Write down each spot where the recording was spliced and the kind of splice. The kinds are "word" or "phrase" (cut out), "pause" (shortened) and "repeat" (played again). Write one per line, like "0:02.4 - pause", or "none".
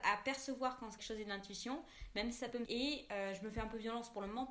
0:01.0 - word
0:02.7 - phrase